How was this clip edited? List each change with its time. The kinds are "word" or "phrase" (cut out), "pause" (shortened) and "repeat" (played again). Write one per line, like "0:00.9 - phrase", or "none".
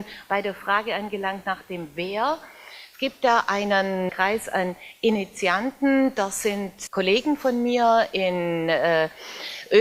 0:04.1 - word
0:06.9 - word